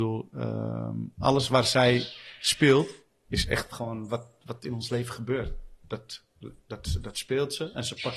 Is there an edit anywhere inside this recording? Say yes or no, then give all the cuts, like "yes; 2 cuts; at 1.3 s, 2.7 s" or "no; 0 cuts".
no; 0 cuts